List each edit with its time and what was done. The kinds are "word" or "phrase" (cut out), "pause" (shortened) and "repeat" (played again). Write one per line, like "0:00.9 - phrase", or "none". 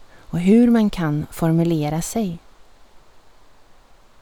none